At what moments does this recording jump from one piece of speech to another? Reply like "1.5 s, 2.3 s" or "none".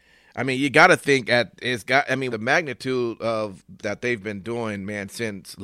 2.3 s, 3.8 s